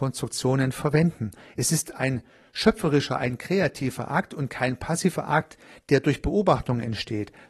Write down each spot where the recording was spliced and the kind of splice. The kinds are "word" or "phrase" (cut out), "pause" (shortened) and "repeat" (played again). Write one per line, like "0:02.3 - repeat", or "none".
none